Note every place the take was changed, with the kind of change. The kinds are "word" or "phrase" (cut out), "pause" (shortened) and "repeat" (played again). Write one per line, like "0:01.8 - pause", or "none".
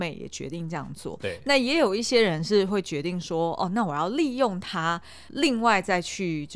0:05.3 - word